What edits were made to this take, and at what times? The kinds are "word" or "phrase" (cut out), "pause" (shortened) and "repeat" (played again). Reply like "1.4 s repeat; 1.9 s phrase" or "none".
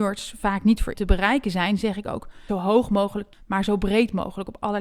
0.9 s word; 2.5 s phrase; 3.3 s word